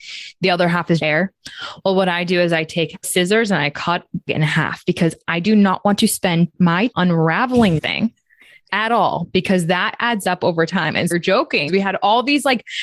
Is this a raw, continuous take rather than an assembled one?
no; 7 cuts; at 1.0 s, 3.0 s, 4.3 s, 6.9 s, 7.8 s, 11.1 s, 11.7 s

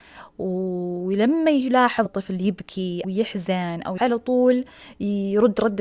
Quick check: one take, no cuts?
no; 3 cuts; at 2.1 s, 3.0 s, 4.0 s

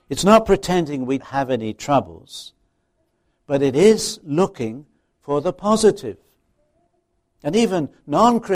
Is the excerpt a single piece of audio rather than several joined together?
no; 1 cut; at 1.2 s

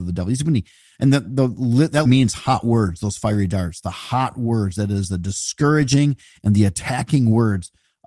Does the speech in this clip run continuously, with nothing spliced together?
no; 1 cut; at 2.1 s

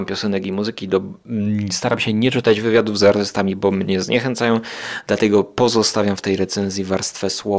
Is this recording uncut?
yes; 0 cuts

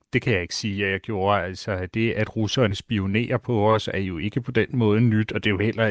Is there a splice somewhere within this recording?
no; 0 cuts

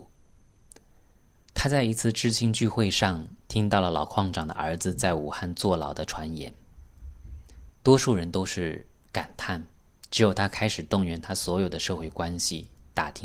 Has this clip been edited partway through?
yes; 2 cuts; at 3.4 s, 7.7 s

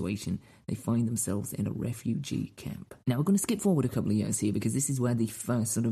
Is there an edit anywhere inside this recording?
yes; 1 cut; at 3.0 s

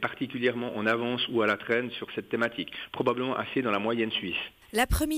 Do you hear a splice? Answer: no; 0 cuts

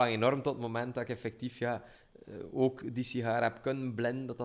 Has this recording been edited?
no; 0 cuts

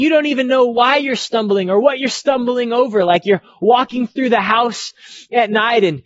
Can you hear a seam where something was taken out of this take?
no; 0 cuts

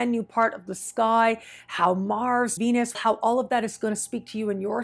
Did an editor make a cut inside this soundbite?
yes; 2 cuts; at 2.6 s, 2.9 s

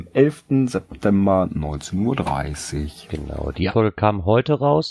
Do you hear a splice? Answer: yes; 1 cut; at 3.7 s

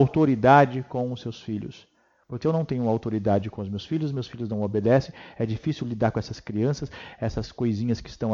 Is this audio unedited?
no; 1 cut; at 2.4 s

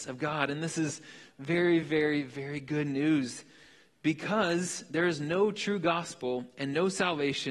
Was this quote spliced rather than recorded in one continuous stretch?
no; 0 cuts

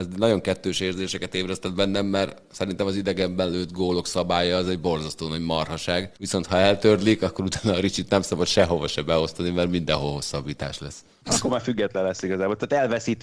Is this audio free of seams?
no; 1 cut; at 6.2 s

